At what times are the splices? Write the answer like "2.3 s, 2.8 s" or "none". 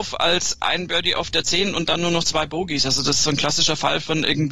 none